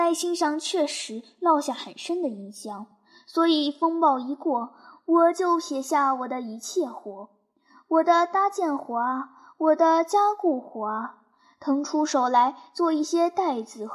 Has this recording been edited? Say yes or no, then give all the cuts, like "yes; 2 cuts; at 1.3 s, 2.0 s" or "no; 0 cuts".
no; 0 cuts